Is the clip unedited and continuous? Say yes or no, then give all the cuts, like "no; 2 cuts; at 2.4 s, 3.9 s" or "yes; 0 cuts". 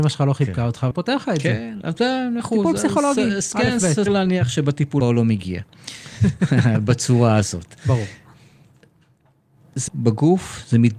no; 5 cuts; at 0.9 s, 2.4 s, 4.1 s, 5.0 s, 9.9 s